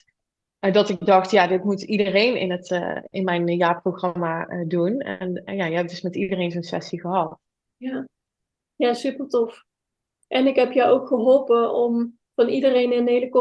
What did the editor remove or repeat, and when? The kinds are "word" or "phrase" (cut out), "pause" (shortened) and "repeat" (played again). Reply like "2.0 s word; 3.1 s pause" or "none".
none

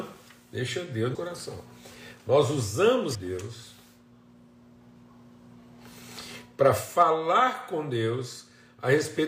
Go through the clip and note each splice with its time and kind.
1.1 s phrase; 3.1 s phrase

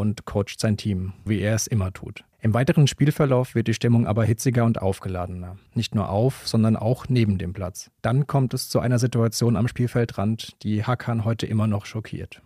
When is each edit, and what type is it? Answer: 1.3 s word; 2.3 s pause; 5.7 s pause; 8.0 s pause

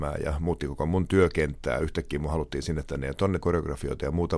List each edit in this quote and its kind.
3.4 s word

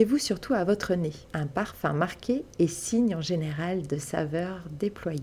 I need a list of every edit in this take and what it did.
1.2 s pause

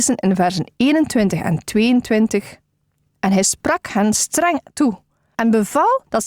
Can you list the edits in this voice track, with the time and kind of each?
none

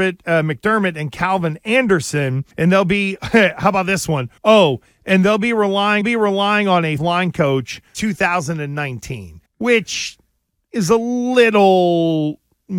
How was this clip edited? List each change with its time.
2.5 s pause; 4.4 s pause; 6.0 s repeat; 7.0 s phrase; 7.9 s word; 9.5 s pause

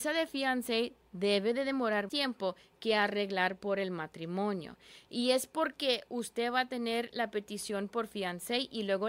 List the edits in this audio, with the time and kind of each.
2.1 s word

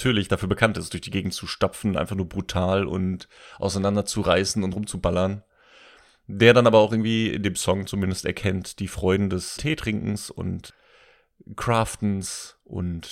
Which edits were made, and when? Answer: 9.6 s word

